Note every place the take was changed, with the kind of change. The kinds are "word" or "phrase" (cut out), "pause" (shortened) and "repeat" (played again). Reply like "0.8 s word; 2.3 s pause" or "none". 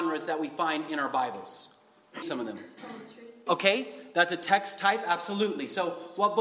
2.2 s word; 3.5 s word